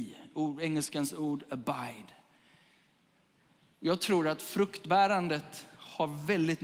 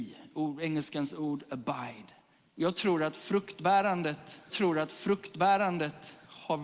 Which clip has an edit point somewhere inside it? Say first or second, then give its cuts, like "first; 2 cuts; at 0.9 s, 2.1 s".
second; 2 cuts; at 2.4 s, 4.5 s